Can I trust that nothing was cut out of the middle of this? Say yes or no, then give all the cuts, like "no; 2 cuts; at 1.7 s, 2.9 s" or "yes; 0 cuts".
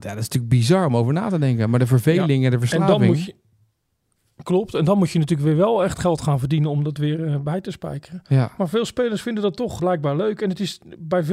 no; 1 cut; at 9.8 s